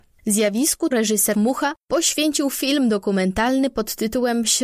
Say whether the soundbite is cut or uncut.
cut